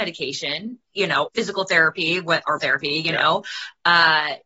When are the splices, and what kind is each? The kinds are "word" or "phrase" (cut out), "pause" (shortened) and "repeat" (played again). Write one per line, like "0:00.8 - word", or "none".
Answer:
0:01.3 - word
0:02.6 - word